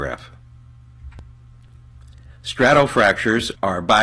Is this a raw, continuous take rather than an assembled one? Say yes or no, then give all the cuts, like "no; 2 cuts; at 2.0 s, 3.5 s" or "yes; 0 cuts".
yes; 0 cuts